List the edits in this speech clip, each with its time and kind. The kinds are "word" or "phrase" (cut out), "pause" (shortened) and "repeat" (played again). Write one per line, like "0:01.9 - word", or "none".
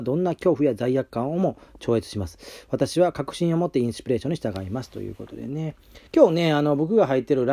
0:06.1 - pause